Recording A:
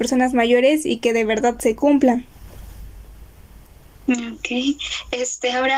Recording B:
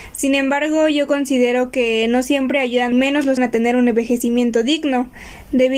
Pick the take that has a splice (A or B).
B